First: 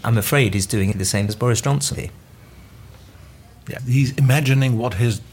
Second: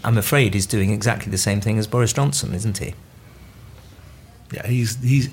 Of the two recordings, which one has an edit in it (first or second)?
first